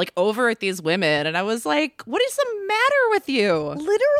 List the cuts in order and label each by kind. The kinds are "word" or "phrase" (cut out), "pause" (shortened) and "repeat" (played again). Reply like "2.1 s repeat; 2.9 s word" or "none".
none